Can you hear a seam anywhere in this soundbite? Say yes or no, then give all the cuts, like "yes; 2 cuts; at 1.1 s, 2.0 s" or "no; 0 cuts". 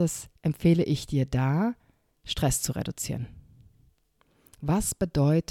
no; 0 cuts